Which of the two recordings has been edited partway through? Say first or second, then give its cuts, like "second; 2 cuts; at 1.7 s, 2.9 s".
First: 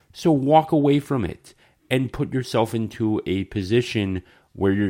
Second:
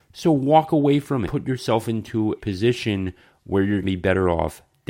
second; 3 cuts; at 1.3 s, 2.4 s, 3.8 s